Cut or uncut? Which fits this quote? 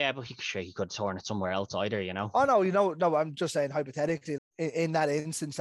cut